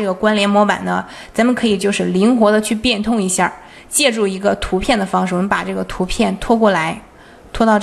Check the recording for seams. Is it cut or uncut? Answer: uncut